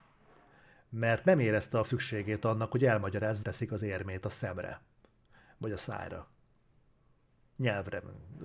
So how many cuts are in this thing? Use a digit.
2